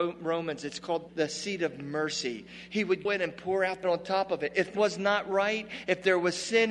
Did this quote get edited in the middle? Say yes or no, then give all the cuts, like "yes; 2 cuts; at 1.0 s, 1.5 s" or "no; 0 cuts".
yes; 4 cuts; at 1.1 s, 3.0 s, 3.8 s, 4.7 s